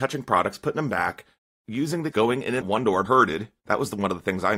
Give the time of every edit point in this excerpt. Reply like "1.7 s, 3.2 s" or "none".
2.1 s, 2.6 s, 3.0 s